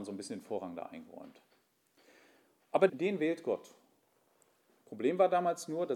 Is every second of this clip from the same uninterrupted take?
no; 1 cut; at 2.9 s

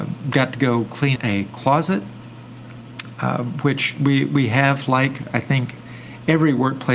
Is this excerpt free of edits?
no; 1 cut; at 1.2 s

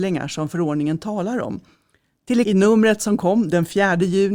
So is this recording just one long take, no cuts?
no; 1 cut; at 2.4 s

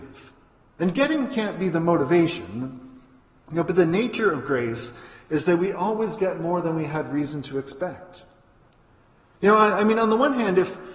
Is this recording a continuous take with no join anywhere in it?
yes; 0 cuts

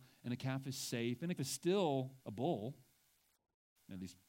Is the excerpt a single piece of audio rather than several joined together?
no; 2 cuts; at 1.4 s, 2.2 s

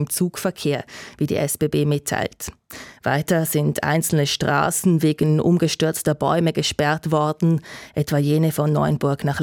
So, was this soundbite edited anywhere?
no; 0 cuts

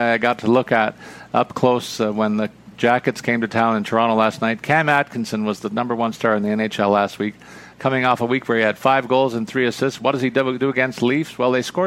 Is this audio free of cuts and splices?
yes; 0 cuts

